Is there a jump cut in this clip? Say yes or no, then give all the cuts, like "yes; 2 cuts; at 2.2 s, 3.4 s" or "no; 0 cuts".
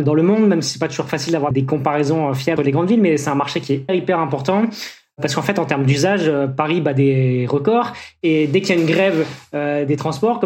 yes; 3 cuts; at 1.5 s, 2.6 s, 3.9 s